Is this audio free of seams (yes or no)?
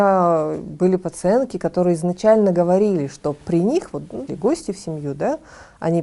no